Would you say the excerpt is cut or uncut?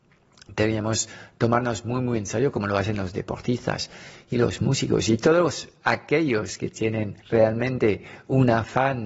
cut